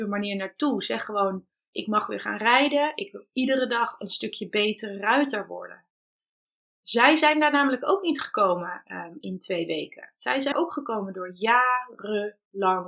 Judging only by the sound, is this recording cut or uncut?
cut